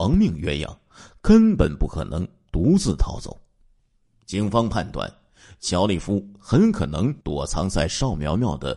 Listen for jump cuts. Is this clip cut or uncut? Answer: cut